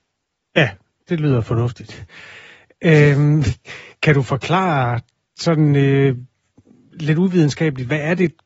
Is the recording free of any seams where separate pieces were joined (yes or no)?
yes